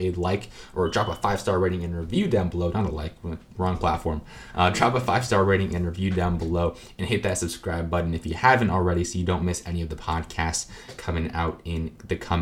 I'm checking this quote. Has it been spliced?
no; 0 cuts

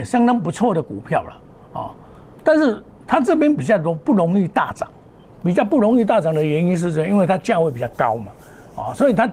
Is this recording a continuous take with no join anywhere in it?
yes; 0 cuts

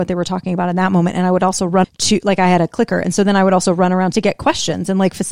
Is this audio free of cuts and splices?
no; 2 cuts; at 1.8 s, 4.1 s

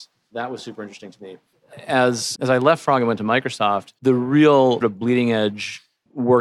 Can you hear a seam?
yes; 3 cuts; at 2.3 s, 4.0 s, 4.8 s

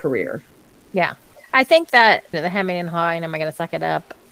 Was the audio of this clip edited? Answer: yes; 2 cuts; at 1.3 s, 2.3 s

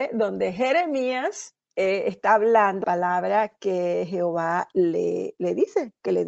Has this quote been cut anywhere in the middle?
yes; 2 cuts; at 1.6 s, 2.8 s

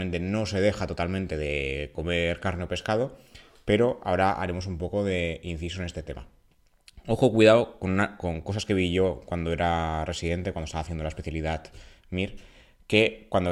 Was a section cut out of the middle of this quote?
no; 0 cuts

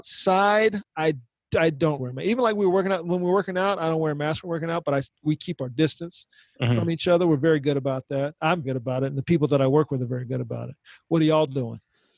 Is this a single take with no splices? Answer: no; 2 cuts; at 2.0 s, 8.6 s

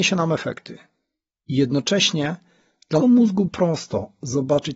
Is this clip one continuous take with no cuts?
no; 2 cuts; at 3.0 s, 3.5 s

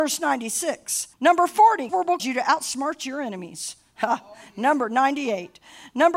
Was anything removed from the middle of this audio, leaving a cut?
yes; 3 cuts; at 1.1 s, 1.9 s, 2.2 s

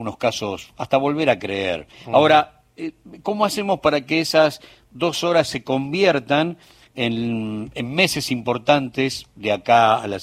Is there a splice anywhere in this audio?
no; 0 cuts

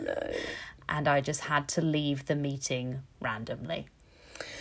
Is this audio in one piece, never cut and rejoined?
yes; 0 cuts

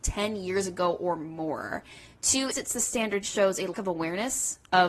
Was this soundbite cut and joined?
yes; 3 cuts; at 2.5 s, 3.2 s, 3.7 s

